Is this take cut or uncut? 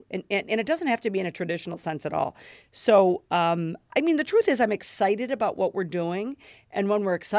uncut